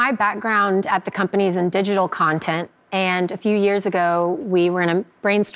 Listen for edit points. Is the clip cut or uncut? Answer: uncut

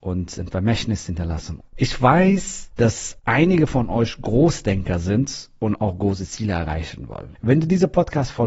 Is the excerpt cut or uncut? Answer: uncut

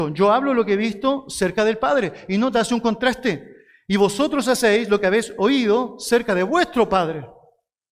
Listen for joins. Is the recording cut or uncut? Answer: uncut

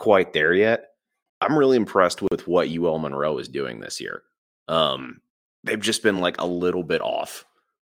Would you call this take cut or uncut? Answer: uncut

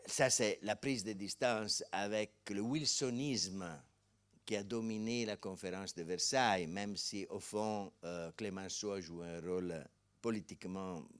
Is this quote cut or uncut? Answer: uncut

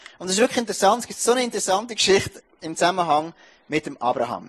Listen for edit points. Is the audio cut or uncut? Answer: uncut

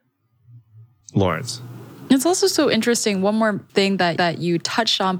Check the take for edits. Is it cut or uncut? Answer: cut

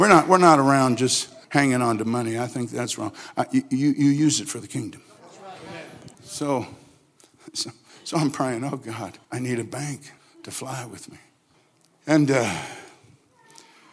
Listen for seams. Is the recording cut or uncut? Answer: cut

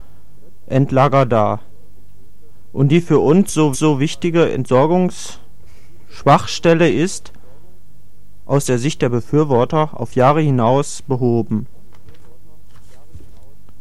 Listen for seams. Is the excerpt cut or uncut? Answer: cut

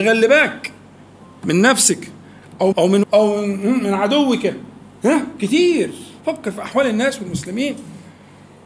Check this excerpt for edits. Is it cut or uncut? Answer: cut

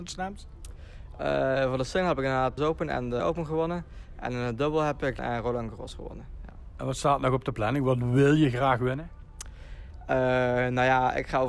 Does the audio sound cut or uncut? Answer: cut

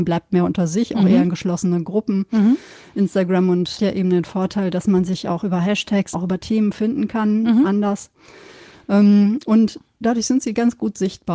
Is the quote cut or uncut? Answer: cut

